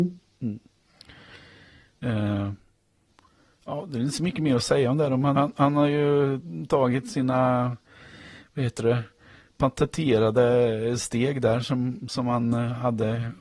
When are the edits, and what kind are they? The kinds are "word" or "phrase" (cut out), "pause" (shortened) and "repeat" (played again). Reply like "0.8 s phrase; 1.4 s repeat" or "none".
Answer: 5.4 s word